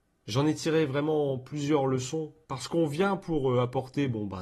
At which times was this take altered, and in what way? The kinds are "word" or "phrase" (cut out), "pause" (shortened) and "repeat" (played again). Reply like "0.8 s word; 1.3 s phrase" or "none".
2.4 s pause